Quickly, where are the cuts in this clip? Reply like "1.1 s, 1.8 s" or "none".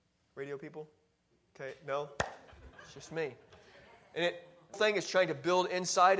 4.7 s